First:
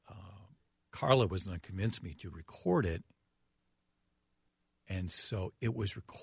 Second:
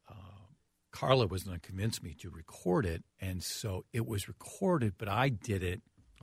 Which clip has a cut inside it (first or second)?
second